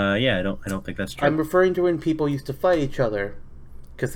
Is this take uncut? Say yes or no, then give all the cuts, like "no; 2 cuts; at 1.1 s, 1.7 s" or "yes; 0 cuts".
yes; 0 cuts